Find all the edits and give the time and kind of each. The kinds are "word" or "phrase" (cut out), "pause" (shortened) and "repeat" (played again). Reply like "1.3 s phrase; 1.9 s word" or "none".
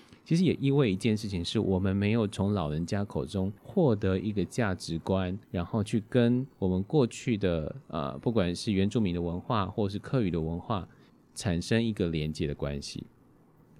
3.6 s pause; 5.4 s pause; 6.5 s pause; 7.8 s pause; 11.1 s pause